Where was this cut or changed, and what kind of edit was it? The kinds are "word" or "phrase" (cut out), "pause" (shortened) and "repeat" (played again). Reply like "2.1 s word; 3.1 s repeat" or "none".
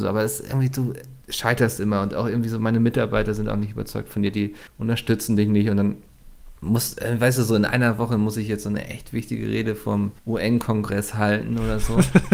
1.2 s pause; 4.7 s pause; 6.6 s pause; 10.2 s pause